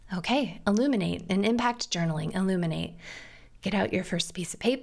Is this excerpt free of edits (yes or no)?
yes